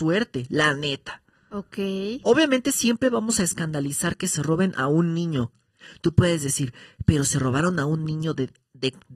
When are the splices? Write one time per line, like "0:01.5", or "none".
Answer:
none